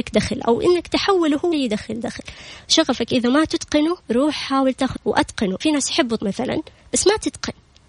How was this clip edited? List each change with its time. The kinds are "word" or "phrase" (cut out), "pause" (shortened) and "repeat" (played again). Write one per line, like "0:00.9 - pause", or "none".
0:01.5 - word
0:04.0 - pause
0:05.0 - word
0:05.6 - word
0:06.2 - word